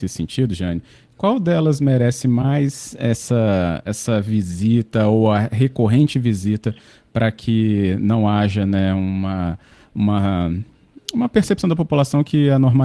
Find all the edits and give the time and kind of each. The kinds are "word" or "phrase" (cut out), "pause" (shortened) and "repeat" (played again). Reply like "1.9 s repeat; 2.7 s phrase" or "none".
none